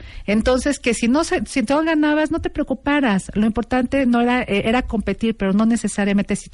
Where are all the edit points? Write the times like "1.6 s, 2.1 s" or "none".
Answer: none